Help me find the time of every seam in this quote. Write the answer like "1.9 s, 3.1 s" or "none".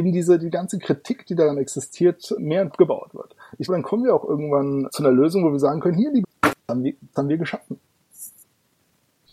2.4 s, 2.7 s, 3.7 s, 4.9 s, 6.2 s, 6.6 s, 7.2 s

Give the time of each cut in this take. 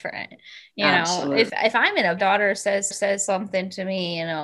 1.5 s, 2.2 s, 2.9 s

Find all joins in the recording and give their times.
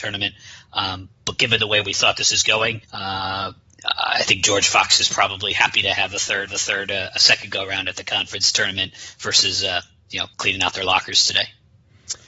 1.2 s, 2.8 s, 6.5 s, 10.3 s

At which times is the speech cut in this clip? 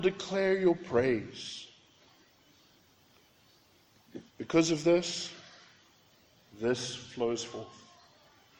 4.3 s

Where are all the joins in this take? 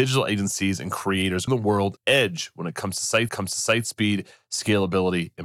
1.5 s, 2.0 s, 3.3 s

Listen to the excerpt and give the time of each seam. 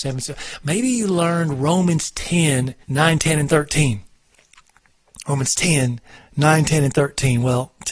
2.8 s, 6.1 s

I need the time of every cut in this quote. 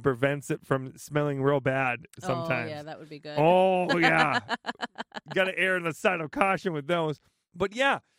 none

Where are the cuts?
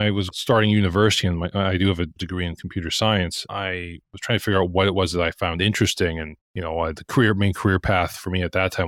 6.4 s

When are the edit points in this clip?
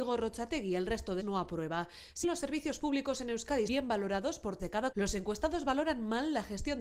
1.2 s, 2.2 s, 3.7 s, 4.6 s, 4.9 s

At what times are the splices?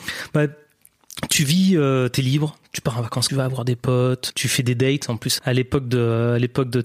3.3 s, 4.3 s, 5.4 s

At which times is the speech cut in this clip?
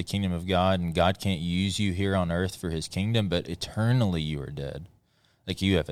none

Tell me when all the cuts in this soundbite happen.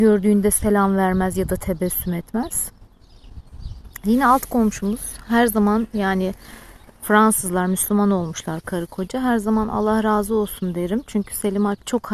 none

